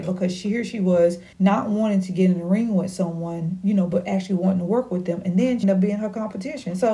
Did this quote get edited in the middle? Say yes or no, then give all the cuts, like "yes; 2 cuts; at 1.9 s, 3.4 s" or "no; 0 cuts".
yes; 2 cuts; at 1.3 s, 5.6 s